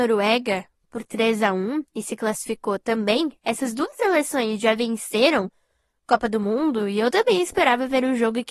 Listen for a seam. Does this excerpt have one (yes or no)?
yes